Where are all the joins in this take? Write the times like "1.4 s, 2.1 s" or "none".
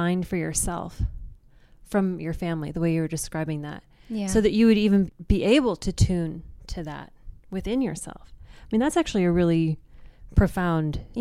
none